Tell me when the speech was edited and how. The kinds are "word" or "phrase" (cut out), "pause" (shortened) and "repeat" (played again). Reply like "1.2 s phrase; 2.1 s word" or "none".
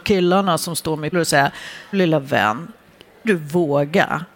1.1 s word; 1.9 s word; 3.2 s word

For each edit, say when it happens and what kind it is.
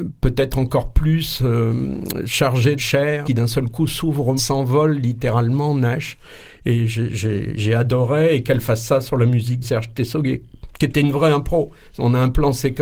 2.8 s phrase; 3.2 s phrase; 4.4 s phrase; 9.6 s word

